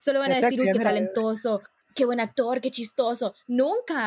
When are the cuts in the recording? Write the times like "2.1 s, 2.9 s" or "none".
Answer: 1.8 s

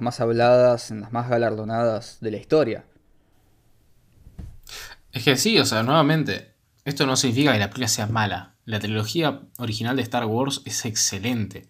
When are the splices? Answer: none

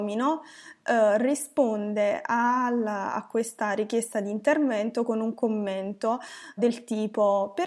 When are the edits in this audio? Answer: 6.6 s

